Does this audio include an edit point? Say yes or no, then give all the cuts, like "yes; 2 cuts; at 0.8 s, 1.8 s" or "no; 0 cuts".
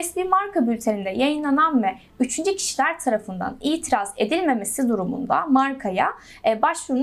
no; 0 cuts